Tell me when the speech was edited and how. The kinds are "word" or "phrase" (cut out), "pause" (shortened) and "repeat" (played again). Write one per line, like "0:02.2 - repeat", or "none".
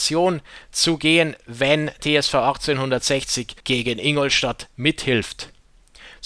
0:02.0 - word
0:03.6 - pause